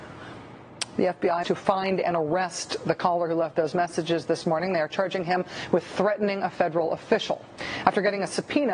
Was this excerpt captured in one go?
no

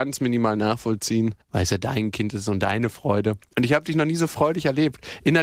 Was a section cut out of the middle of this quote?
yes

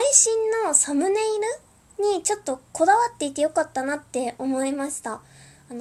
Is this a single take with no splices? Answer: yes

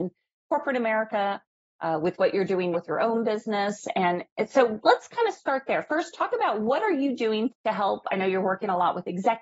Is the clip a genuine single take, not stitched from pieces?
no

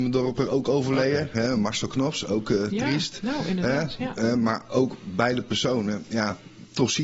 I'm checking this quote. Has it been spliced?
no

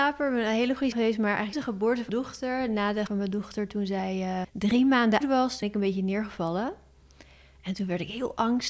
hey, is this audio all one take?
no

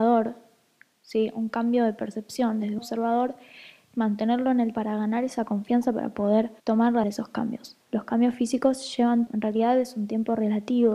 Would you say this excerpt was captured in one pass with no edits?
no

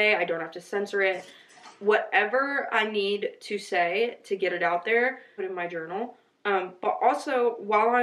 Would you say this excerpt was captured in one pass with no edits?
no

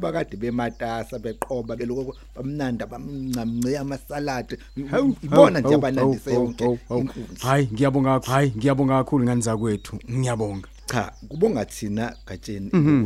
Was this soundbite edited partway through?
yes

